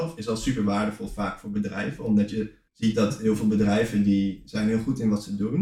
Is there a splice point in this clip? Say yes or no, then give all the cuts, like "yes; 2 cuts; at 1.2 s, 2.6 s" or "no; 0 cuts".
yes; 1 cut; at 2.7 s